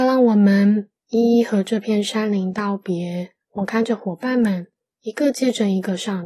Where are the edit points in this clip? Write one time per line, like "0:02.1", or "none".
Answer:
0:03.4